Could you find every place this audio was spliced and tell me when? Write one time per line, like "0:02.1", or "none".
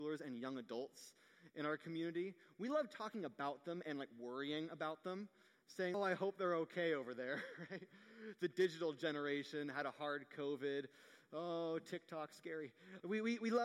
0:05.9